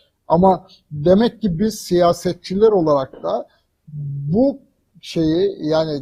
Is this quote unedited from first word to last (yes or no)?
yes